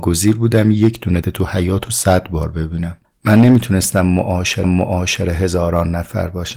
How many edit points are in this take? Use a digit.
3